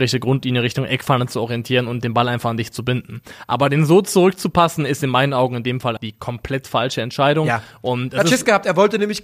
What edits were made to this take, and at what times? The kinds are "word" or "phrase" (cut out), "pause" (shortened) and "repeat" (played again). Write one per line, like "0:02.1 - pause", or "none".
0:06.0 - word